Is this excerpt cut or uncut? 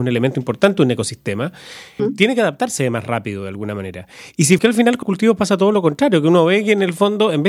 cut